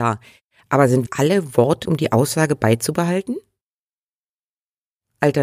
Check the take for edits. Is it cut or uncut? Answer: cut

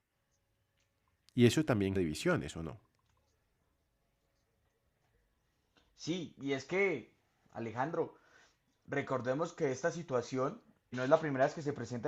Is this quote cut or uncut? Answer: cut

